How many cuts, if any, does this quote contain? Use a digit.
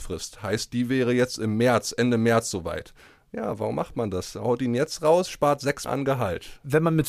1